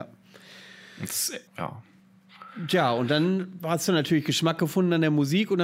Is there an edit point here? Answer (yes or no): yes